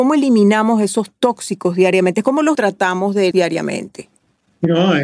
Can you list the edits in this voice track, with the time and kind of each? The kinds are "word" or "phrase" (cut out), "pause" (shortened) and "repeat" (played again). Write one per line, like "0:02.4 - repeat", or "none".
0:02.5 - phrase
0:03.3 - word